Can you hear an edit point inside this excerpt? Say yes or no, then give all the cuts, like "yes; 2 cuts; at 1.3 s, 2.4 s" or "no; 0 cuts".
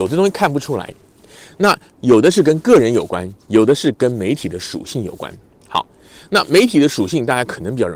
no; 0 cuts